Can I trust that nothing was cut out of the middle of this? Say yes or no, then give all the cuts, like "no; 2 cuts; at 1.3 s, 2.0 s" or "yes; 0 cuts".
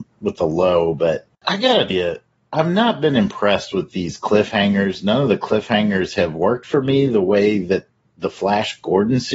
no; 2 cuts; at 1.3 s, 1.9 s